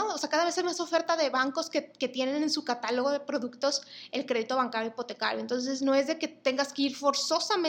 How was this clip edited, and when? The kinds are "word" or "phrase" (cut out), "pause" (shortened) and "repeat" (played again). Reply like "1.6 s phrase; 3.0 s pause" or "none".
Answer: none